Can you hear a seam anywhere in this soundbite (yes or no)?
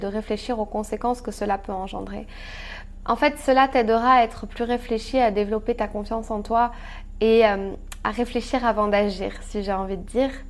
no